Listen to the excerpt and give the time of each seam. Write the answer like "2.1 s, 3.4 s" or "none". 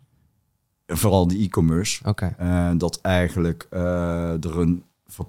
none